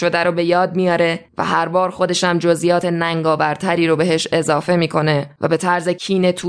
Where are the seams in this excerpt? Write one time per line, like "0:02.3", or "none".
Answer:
none